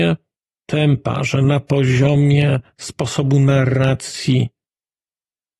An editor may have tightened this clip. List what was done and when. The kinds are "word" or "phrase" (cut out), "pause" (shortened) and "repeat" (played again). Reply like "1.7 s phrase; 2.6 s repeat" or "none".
none